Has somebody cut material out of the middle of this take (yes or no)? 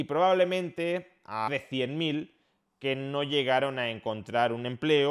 yes